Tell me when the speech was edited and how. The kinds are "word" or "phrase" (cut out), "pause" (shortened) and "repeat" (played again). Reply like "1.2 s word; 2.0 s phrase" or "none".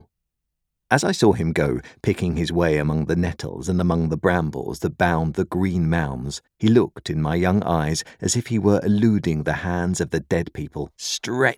6.5 s pause

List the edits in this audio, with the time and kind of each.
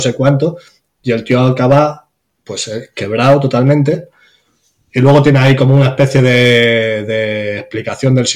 none

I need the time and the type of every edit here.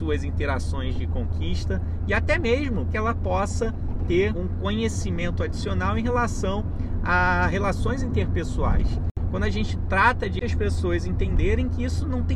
2.9 s word; 4.3 s word; 10.4 s phrase

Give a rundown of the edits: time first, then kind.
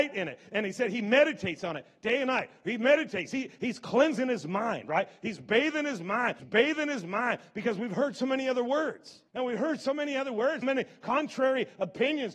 6.4 s repeat; 9.3 s pause; 10.6 s word

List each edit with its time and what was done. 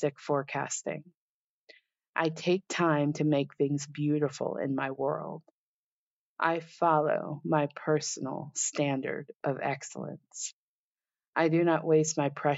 none

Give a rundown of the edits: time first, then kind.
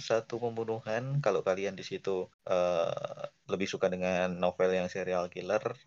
2.3 s pause

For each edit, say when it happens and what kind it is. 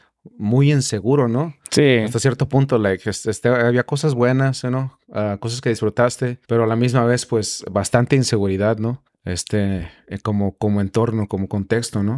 6.4 s pause; 9.1 s pause

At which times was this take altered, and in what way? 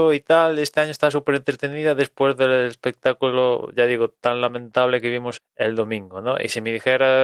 5.4 s word

